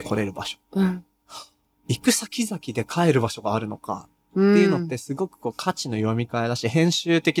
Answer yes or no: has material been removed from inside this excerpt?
no